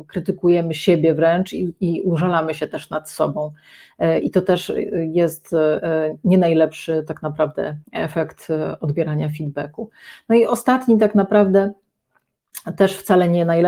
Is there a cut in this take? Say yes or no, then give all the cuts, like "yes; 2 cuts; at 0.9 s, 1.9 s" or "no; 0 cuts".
yes; 1 cut; at 7.8 s